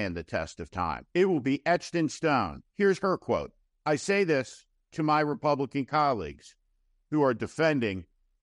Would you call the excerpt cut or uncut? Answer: cut